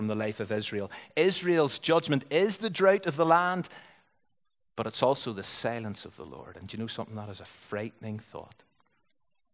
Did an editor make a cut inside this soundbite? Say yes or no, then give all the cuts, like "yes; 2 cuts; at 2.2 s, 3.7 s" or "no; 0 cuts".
no; 0 cuts